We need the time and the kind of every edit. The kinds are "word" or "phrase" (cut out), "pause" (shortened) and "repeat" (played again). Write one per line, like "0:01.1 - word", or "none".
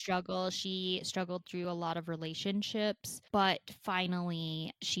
none